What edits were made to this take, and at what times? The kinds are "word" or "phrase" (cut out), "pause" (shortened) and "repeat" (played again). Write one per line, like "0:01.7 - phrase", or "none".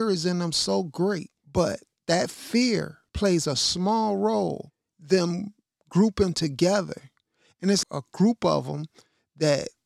0:03.1 - pause
0:04.9 - word
0:07.8 - word